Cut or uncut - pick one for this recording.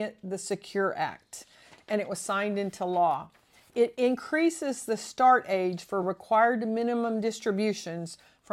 uncut